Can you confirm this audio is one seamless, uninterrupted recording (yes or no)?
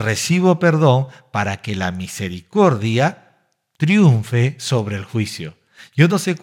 yes